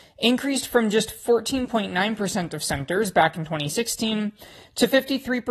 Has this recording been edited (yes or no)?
no